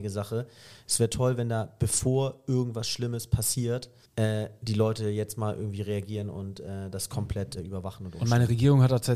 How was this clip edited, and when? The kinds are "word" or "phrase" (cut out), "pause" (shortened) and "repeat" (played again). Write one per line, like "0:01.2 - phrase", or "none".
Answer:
0:04.1 - pause
0:07.6 - word